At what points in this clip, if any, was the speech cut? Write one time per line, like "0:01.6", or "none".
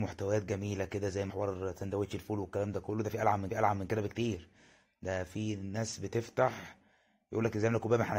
0:01.3
0:03.5